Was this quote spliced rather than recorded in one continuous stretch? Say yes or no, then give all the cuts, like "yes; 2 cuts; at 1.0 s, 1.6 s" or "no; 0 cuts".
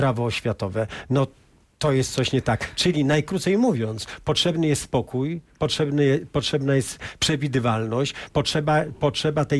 no; 0 cuts